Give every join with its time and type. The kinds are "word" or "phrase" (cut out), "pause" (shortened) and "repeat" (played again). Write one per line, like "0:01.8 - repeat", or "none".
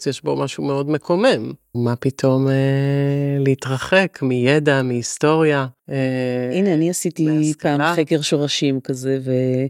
0:05.8 - pause